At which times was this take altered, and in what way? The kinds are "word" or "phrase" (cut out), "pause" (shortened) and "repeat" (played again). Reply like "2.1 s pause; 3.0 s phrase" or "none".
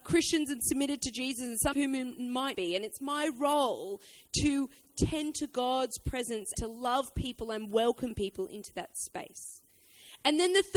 1.7 s word; 2.5 s word; 6.5 s word